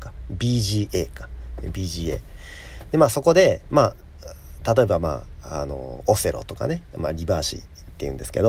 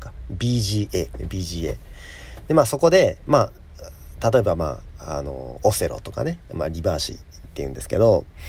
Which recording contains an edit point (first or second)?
second